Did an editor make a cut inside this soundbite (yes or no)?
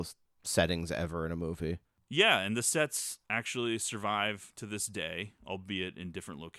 yes